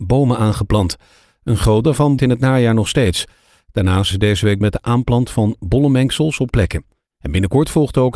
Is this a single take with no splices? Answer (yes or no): no